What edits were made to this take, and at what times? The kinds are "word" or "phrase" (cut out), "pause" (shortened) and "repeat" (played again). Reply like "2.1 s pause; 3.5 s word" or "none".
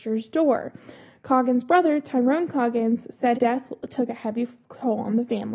3.3 s word